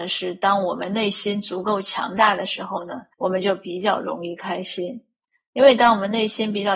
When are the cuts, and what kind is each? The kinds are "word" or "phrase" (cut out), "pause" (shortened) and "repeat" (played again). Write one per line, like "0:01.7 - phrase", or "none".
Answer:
0:03.1 - pause